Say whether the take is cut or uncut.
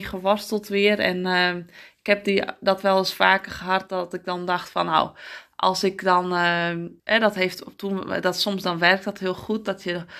cut